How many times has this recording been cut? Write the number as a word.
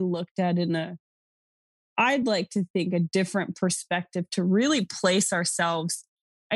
zero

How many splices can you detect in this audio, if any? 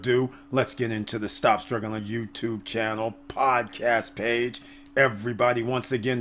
one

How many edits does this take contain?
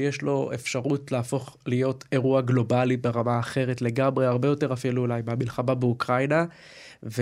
zero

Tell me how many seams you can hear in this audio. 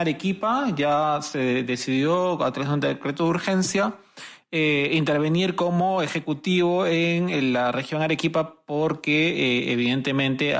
zero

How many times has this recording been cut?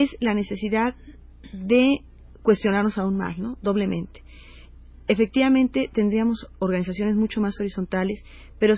zero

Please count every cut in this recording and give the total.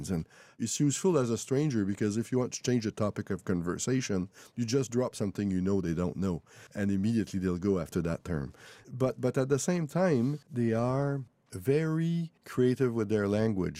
three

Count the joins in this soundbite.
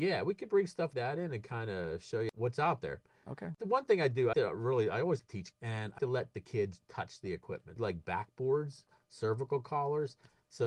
six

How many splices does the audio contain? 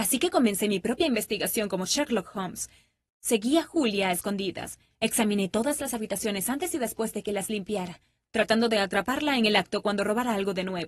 zero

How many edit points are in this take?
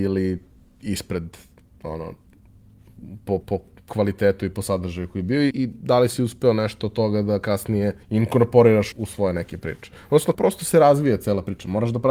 five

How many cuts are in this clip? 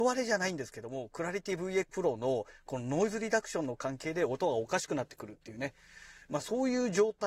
one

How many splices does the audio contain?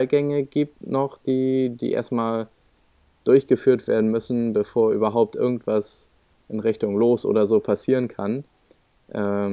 zero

